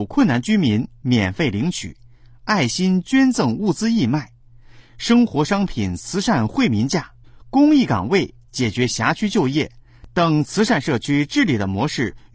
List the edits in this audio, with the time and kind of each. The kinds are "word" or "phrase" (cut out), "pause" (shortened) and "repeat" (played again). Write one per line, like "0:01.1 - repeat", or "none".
0:07.2 - pause